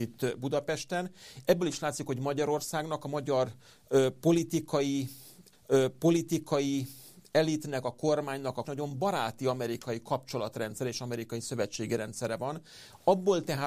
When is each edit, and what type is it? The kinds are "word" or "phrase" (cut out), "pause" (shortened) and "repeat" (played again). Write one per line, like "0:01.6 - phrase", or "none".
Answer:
0:05.5 - repeat
0:08.6 - phrase